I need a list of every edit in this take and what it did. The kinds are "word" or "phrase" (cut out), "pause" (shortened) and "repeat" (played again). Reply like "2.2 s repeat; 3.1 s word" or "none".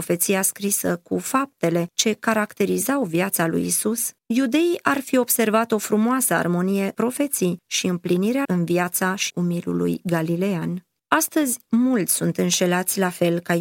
4.2 s pause; 6.9 s word; 8.4 s word; 9.3 s word; 11.0 s pause